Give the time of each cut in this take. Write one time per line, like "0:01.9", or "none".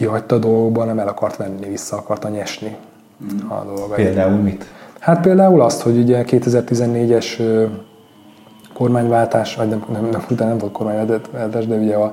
0:10.3